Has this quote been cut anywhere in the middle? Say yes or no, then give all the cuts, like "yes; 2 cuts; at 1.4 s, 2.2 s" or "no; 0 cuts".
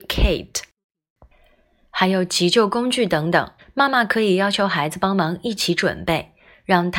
yes; 1 cut; at 3.6 s